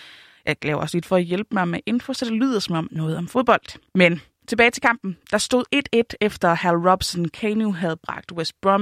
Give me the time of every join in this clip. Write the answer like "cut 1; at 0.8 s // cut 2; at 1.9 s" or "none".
cut 1; at 1.0 s // cut 2; at 2.9 s // cut 3; at 3.9 s